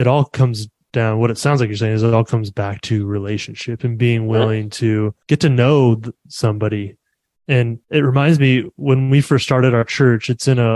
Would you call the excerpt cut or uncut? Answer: cut